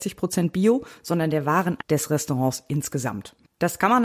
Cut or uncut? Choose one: cut